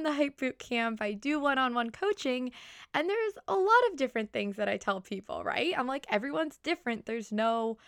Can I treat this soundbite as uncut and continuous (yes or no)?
yes